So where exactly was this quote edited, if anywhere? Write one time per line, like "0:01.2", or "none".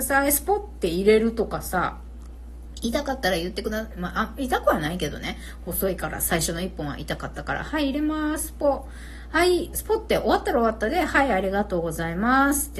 0:09.7